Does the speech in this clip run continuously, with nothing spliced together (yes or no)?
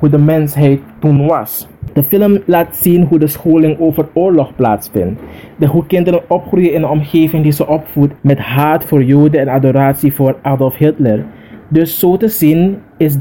no